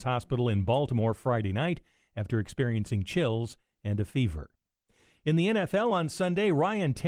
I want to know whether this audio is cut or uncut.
uncut